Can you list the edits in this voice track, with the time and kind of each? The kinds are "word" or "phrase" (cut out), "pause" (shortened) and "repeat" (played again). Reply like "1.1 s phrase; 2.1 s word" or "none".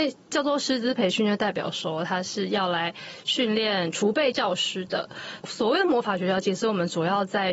none